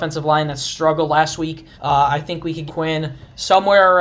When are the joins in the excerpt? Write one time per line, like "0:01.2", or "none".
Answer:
0:01.7
0:02.7